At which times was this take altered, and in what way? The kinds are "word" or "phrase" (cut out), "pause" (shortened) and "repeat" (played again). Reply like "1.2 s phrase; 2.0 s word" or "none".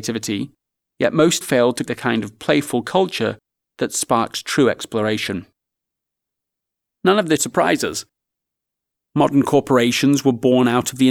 1.4 s word; 1.9 s word; 7.4 s word